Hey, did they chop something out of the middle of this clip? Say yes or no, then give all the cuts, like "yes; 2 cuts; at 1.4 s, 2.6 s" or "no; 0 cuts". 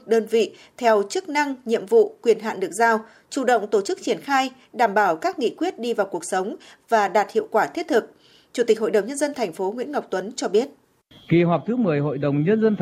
no; 0 cuts